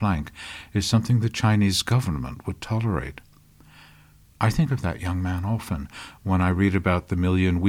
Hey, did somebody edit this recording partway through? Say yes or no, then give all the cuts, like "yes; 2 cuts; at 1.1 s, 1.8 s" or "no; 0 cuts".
no; 0 cuts